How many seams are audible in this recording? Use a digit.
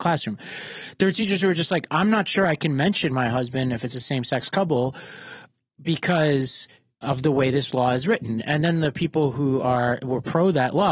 0